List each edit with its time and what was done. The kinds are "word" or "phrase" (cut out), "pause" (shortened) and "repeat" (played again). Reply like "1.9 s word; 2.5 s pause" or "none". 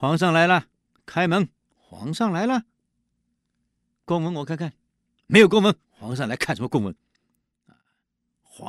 1.7 s pause; 5.8 s pause